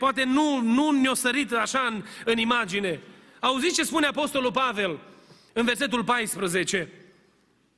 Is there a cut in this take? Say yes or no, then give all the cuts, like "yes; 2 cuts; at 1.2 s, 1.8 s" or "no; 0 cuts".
no; 0 cuts